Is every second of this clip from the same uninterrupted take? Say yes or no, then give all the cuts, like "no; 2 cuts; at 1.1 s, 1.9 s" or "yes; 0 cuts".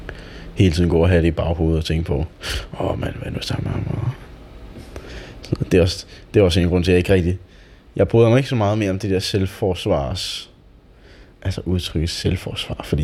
yes; 0 cuts